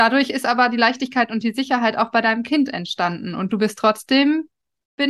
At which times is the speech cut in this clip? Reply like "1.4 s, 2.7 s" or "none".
none